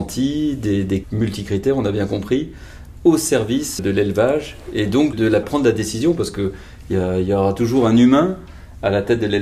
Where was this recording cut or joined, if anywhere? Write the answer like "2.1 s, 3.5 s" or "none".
1.0 s, 3.8 s, 5.1 s, 5.4 s